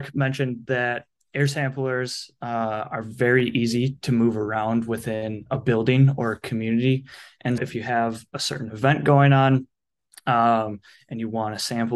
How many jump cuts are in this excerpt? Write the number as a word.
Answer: one